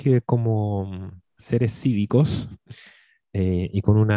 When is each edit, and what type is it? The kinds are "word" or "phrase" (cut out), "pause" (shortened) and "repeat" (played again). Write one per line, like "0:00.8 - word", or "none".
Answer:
none